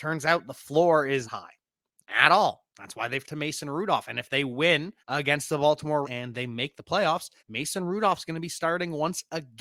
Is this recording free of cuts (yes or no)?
no